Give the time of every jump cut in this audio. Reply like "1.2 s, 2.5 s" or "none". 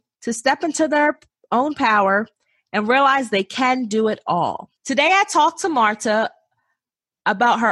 4.8 s